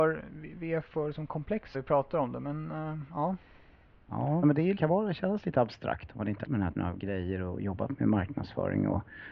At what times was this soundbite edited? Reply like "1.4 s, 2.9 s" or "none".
1.7 s, 4.4 s, 4.8 s, 6.4 s, 6.8 s

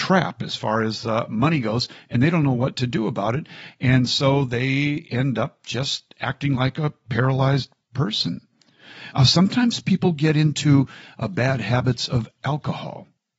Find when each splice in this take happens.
none

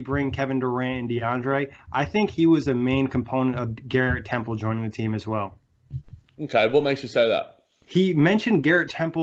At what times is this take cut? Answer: none

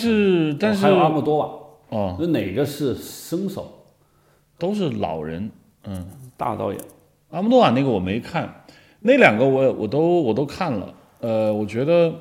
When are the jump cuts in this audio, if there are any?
none

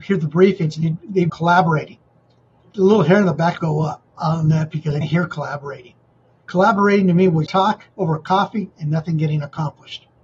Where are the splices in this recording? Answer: 1.3 s, 3.6 s, 4.1 s, 5.0 s, 7.5 s, 7.9 s

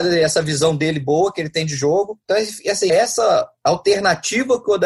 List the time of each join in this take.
2.2 s, 2.9 s

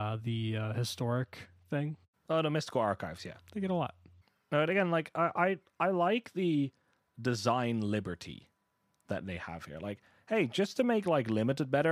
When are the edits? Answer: none

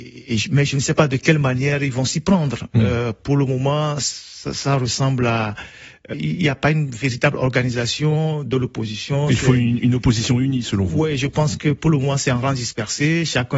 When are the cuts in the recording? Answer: 6.1 s

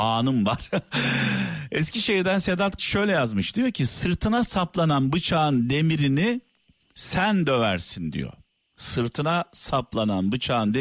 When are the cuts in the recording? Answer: 2.8 s

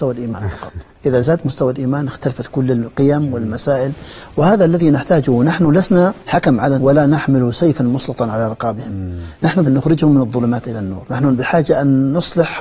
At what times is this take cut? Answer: 6.2 s, 6.8 s, 9.7 s

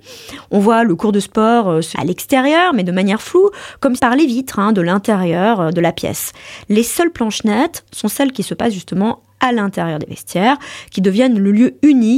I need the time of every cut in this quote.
1.9 s, 4.0 s

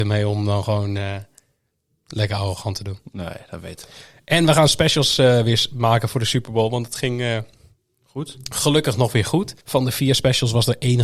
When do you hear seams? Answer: 9.6 s

